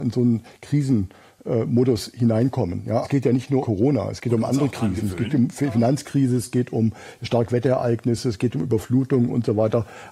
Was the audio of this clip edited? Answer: yes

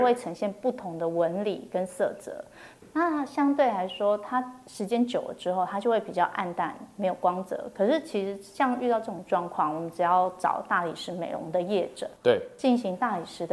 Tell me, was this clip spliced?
no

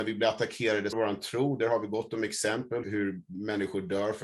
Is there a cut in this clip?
yes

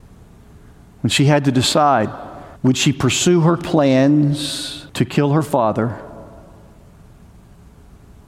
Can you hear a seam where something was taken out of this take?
yes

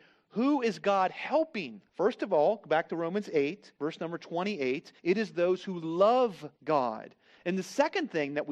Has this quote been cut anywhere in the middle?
yes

